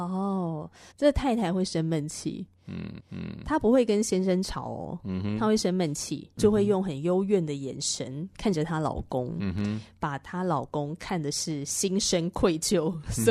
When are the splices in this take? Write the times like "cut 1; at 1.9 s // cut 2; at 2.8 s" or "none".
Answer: cut 1; at 0.9 s // cut 2; at 3.0 s